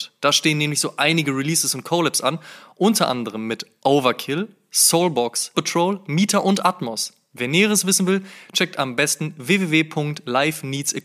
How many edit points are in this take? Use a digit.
1